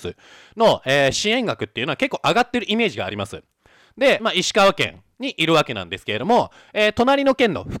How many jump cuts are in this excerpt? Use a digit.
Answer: 1